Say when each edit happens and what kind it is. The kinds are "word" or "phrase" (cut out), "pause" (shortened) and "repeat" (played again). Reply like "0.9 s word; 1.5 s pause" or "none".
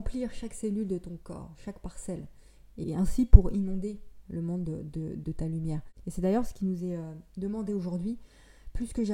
2.8 s word